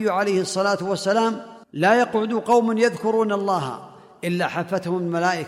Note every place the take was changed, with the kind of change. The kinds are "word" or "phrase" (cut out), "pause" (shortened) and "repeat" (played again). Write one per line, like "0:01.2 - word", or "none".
0:01.6 - pause